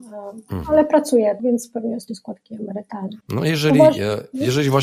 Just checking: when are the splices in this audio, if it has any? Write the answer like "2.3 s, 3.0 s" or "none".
1.4 s, 2.1 s, 3.2 s